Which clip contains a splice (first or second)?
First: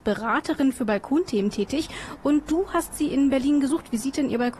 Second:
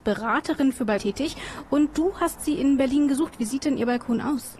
second